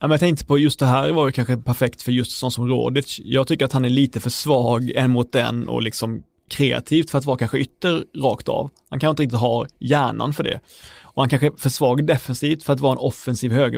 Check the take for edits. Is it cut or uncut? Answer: uncut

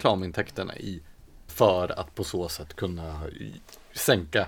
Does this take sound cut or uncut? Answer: cut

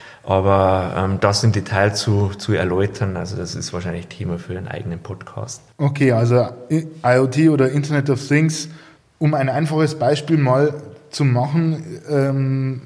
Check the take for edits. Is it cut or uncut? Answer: cut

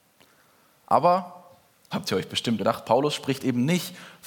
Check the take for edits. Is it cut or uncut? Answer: cut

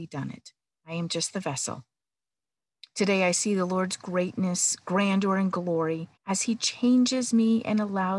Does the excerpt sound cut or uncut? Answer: cut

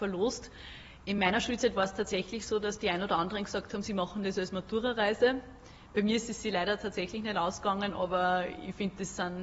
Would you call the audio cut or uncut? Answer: uncut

